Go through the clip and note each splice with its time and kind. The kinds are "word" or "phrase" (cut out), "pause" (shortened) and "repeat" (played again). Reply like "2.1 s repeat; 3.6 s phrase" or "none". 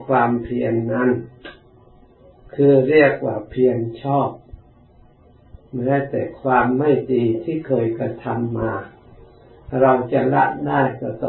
none